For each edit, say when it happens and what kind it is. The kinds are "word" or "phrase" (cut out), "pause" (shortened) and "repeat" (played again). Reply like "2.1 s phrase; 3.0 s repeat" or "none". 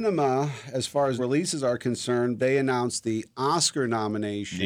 1.2 s word; 2.4 s word